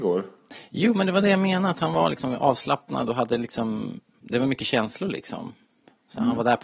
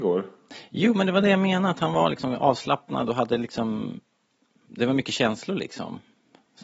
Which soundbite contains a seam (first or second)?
first